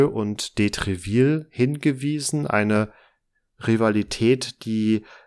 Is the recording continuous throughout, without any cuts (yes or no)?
yes